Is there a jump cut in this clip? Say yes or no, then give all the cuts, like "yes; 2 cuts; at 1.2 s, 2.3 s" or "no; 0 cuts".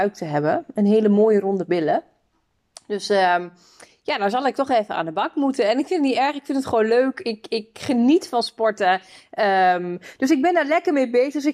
no; 0 cuts